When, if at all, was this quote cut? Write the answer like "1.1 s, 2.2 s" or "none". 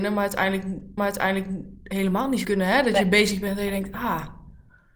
1.0 s, 2.4 s